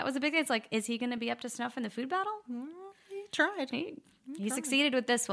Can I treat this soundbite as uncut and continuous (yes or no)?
yes